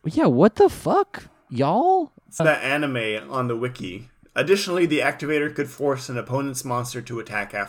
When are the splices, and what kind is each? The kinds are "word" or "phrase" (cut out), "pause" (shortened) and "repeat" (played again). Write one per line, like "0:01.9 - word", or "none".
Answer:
0:02.4 - phrase